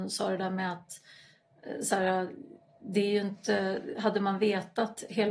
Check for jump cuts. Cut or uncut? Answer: uncut